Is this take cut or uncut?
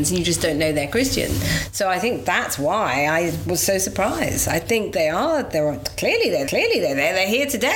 cut